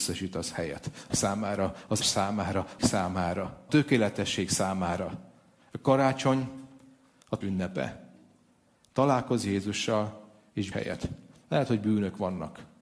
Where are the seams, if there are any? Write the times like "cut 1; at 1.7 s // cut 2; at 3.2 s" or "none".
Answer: cut 1; at 1.1 s // cut 2; at 2.0 s // cut 3; at 2.8 s // cut 4; at 3.7 s // cut 5; at 7.4 s // cut 6; at 10.7 s